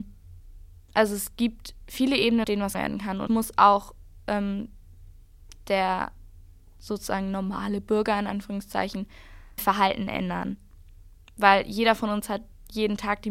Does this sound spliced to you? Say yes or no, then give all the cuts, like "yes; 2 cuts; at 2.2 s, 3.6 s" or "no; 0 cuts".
yes; 4 cuts; at 2.4 s, 2.7 s, 3.3 s, 9.6 s